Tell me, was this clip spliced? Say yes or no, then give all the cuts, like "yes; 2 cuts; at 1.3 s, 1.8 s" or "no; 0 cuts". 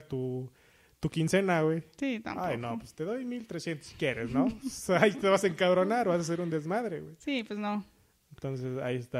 no; 0 cuts